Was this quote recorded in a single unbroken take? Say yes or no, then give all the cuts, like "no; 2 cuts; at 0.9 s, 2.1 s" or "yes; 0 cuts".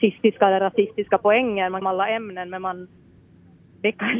no; 1 cut; at 1.8 s